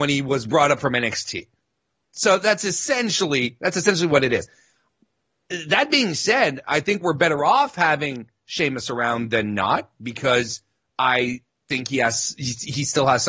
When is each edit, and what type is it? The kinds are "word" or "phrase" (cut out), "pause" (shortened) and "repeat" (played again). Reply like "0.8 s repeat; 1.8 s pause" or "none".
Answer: none